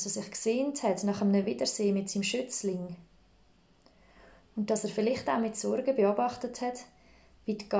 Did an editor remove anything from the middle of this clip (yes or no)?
no